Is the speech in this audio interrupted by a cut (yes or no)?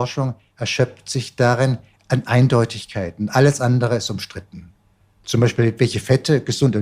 no